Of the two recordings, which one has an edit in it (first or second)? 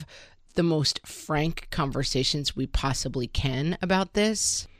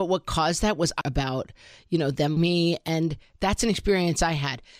second